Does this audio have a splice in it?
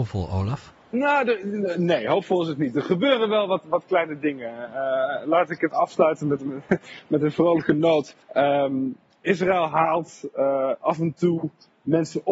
yes; 2 cuts; at 5.7 s, 8.2 s

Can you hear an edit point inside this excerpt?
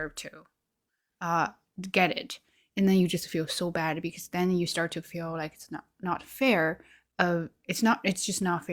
no; 0 cuts

